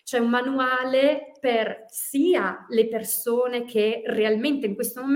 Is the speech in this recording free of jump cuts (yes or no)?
yes